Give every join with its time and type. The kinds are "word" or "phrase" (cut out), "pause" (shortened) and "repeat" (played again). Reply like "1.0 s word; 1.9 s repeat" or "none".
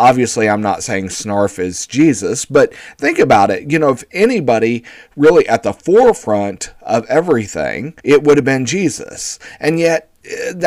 5.1 s phrase; 8.0 s pause